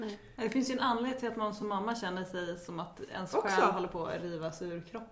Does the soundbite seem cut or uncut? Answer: uncut